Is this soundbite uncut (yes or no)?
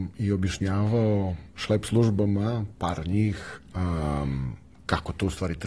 yes